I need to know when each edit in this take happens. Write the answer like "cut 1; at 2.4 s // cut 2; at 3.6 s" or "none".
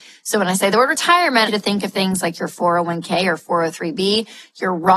cut 1; at 1.5 s